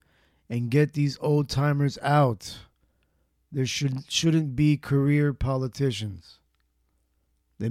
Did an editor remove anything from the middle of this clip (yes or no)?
no